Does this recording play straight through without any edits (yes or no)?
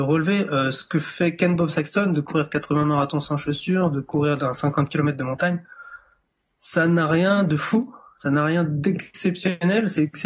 yes